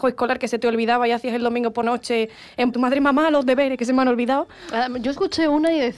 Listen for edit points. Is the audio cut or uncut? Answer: cut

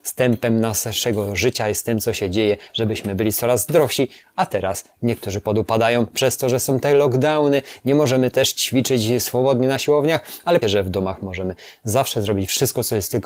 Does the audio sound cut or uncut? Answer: cut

